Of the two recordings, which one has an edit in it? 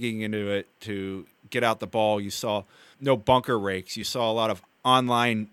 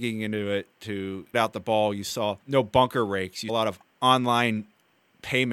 second; 3 cuts; at 1.3 s, 2.4 s, 3.5 s

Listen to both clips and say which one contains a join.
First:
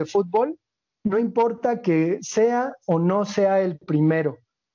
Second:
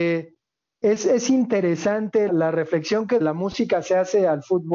second; 2 cuts; at 2.3 s, 3.2 s

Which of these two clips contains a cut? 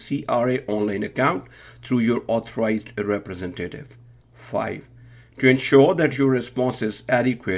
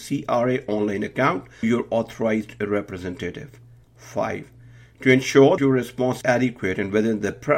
second; 3 cuts; at 1.6 s, 5.6 s, 6.2 s

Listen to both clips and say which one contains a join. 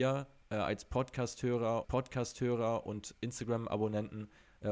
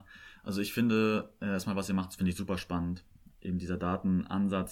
first; 1 cut; at 1.8 s

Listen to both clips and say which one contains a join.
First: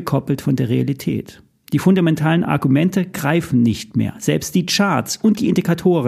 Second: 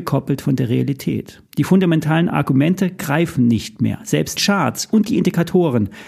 second; 2 cuts; at 1.5 s, 4.4 s

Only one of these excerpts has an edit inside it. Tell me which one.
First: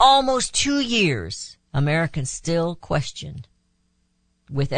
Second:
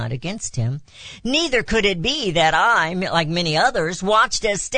first; 1 cut; at 1.7 s

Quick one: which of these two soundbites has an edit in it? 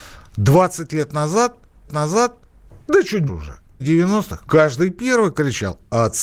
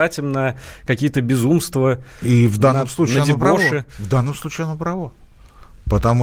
first; 4 cuts; at 1.9 s, 3.3 s, 3.8 s, 4.5 s

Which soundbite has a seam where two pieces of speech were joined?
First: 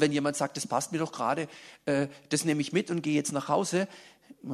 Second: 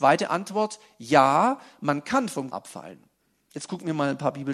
second; 1 cut; at 2.5 s

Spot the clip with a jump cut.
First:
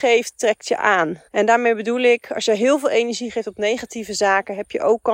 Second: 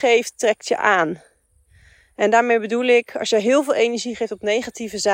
first; 1 cut; at 1.3 s

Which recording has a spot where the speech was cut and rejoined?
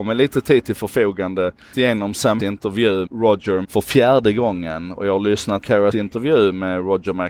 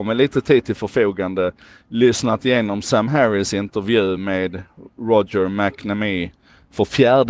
first; 6 cuts; at 1.7 s, 2.4 s, 3.1 s, 3.6 s, 5.6 s, 5.9 s

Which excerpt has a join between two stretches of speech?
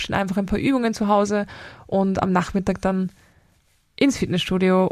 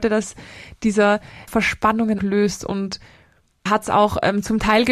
second; 3 cuts; at 1.5 s, 2.2 s, 3.7 s

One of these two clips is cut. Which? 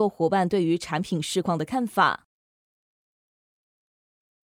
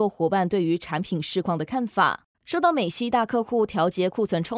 second; 1 cut; at 2.3 s

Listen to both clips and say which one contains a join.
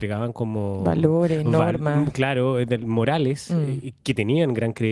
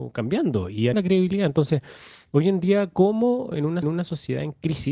second; 3 cuts; at 0.9 s, 3.5 s, 3.8 s

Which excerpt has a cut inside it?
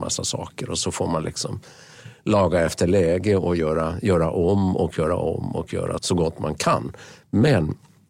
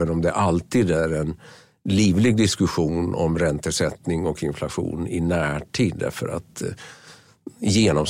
first; 1 cut; at 6.0 s

